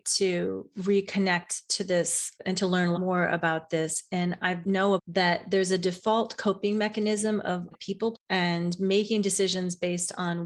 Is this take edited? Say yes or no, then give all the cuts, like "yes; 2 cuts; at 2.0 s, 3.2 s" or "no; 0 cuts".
yes; 4 cuts; at 2.9 s, 5.0 s, 7.7 s, 8.1 s